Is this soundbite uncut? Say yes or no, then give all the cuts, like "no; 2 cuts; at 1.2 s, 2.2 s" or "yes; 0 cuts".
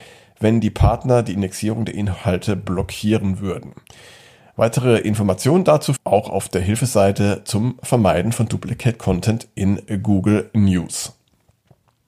no; 1 cut; at 6.0 s